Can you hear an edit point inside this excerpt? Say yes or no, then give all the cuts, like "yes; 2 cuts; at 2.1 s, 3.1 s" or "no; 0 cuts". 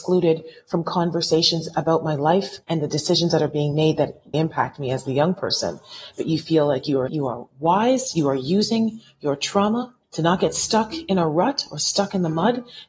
yes; 4 cuts; at 2.6 s, 4.3 s, 7.1 s, 10.0 s